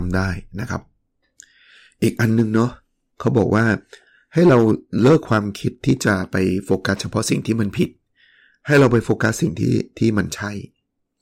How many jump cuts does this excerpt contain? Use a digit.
0